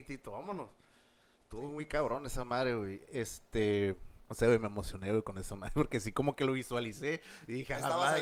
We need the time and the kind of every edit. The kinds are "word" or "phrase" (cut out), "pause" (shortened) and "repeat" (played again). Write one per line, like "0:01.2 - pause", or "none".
0:04.2 - pause